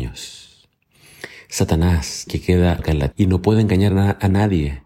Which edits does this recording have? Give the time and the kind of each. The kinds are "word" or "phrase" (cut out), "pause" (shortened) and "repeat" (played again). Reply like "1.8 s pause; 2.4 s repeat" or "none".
2.3 s word; 2.8 s word; 3.1 s word